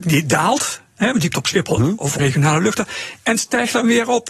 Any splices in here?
yes; 3 cuts; at 1.3 s, 1.8 s, 2.2 s

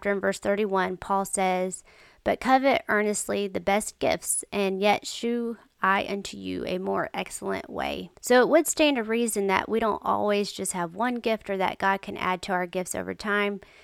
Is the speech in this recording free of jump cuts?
no; 1 cut; at 8.2 s

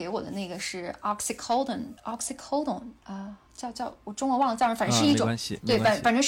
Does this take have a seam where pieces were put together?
yes; 2 cuts; at 2.0 s, 3.5 s

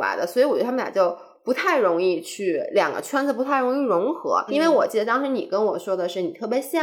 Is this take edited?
yes; 1 cut; at 4.5 s

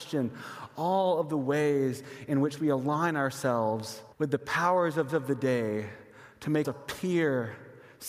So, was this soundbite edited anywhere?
yes; 3 cuts; at 4.1 s, 5.1 s, 6.6 s

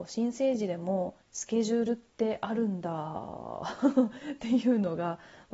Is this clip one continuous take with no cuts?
no; 1 cut; at 1.2 s

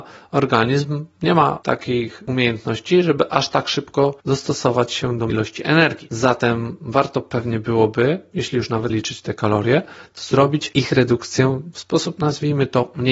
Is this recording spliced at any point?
yes; 3 cuts; at 4.2 s, 5.3 s, 8.9 s

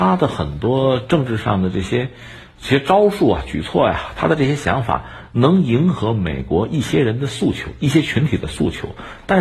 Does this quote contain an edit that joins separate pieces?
no; 0 cuts

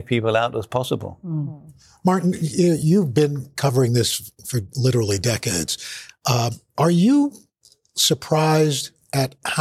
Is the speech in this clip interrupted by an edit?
no; 0 cuts

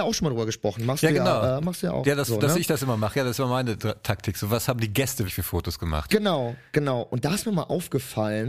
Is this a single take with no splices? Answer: no; 1 cut; at 5.3 s

